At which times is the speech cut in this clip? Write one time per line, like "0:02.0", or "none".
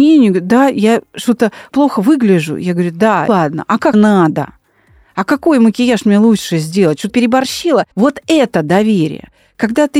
0:01.7
0:03.3
0:03.9
0:07.1
0:07.9